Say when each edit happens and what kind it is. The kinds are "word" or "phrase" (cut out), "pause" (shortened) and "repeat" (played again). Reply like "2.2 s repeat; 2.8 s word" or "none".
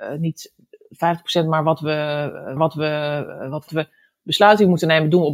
2.6 s repeat; 3.7 s phrase